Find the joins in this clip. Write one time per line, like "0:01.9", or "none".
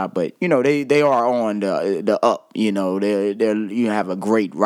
none